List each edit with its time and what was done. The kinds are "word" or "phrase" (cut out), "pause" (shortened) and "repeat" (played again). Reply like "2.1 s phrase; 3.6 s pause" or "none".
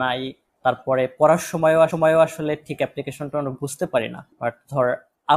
1.9 s repeat

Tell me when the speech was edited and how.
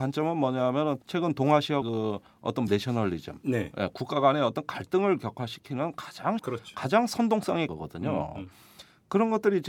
1.0 s pause; 1.8 s word; 2.7 s word; 6.4 s phrase; 7.7 s word

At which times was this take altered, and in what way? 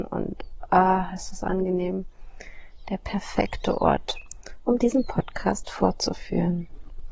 none

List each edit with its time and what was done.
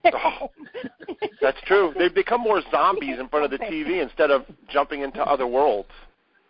none

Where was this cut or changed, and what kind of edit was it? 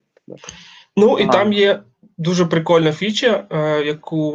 none

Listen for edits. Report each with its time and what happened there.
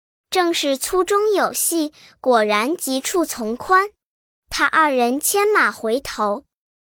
none

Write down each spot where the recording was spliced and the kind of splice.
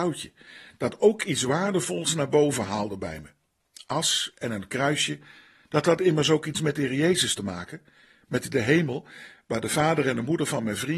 none

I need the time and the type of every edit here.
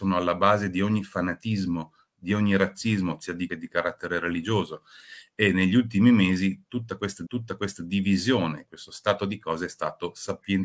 3.5 s phrase; 7.3 s repeat

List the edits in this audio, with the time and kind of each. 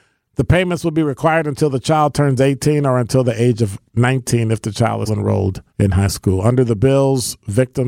5.1 s word; 5.7 s pause

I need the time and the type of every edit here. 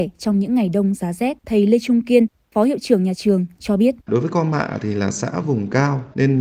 1.4 s pause; 4.0 s pause

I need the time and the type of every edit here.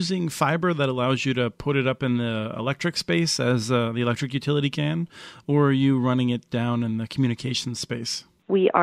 none

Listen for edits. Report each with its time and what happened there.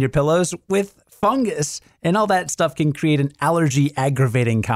none

